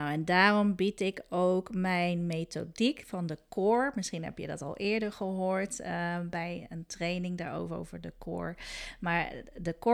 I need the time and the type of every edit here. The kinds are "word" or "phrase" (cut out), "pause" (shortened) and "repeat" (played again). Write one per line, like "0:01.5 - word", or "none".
none